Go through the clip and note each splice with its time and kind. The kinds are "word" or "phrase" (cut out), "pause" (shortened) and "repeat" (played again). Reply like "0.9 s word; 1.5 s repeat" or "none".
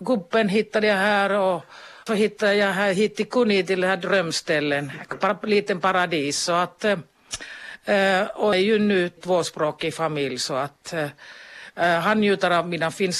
2.1 s word; 8.5 s word; 9.2 s word